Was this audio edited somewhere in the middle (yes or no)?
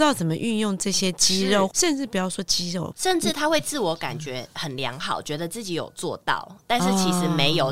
yes